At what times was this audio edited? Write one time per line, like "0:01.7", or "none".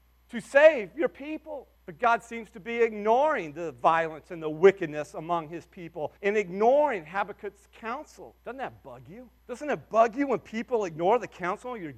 0:01.7
0:06.2
0:08.4
0:09.4